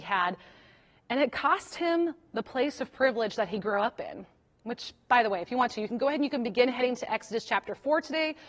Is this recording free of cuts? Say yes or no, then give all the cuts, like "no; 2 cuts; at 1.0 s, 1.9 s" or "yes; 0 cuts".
yes; 0 cuts